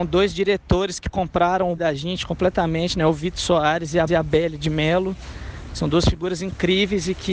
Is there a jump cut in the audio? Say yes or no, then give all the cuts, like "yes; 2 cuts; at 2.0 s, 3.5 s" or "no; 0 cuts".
yes; 2 cuts; at 1.8 s, 4.1 s